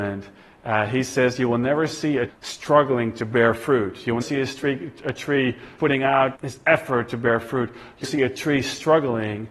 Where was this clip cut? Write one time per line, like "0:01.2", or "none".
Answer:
0:02.3
0:04.2
0:05.8
0:06.3
0:08.0